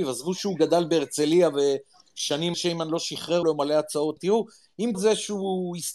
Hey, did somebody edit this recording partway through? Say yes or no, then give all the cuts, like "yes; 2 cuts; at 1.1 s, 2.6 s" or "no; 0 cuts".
yes; 4 cuts; at 2.5 s, 3.4 s, 4.2 s, 4.9 s